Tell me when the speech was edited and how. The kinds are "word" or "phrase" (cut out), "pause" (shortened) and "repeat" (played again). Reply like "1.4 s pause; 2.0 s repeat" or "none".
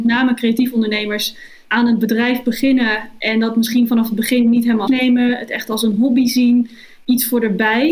4.9 s word